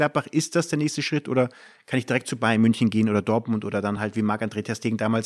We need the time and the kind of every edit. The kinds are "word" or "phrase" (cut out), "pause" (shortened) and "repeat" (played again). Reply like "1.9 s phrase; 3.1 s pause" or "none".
none